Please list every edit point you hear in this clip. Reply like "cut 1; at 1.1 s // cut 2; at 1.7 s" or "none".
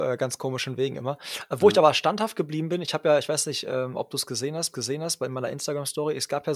cut 1; at 4.7 s